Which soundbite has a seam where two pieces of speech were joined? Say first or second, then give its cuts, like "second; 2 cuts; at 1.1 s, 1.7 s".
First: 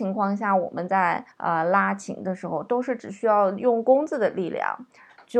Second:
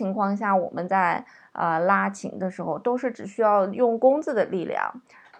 first; 1 cut; at 1.3 s